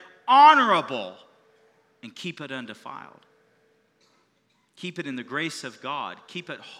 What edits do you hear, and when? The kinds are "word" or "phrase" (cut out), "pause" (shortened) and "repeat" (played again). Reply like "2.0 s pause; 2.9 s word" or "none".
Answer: none

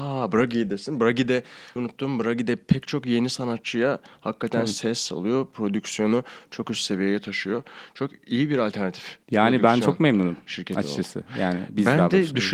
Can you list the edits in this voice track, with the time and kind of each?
1.8 s phrase; 9.2 s pause

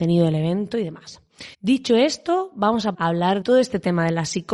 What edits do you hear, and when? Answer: 1.5 s pause; 2.9 s word; 3.4 s word

